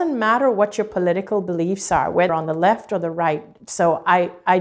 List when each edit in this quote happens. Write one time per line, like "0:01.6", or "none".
0:02.3